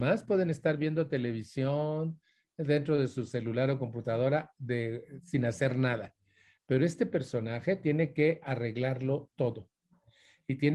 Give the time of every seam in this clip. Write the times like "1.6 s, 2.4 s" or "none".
none